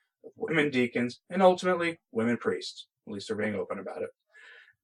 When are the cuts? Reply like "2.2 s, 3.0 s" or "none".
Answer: 3.0 s

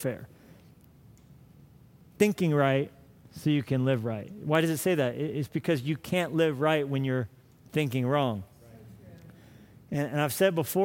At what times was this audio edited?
none

